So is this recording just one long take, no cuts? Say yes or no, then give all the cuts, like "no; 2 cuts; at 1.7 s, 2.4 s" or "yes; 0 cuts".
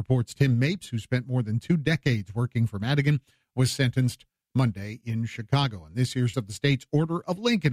no; 1 cut; at 6.3 s